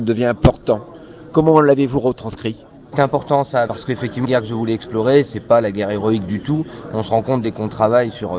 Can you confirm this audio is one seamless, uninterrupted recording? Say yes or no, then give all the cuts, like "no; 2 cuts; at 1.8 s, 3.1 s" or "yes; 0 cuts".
no; 2 cuts; at 3.7 s, 4.2 s